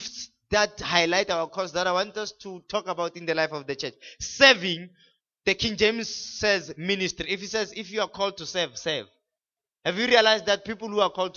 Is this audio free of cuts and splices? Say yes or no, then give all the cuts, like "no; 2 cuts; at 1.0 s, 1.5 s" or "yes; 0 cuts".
yes; 0 cuts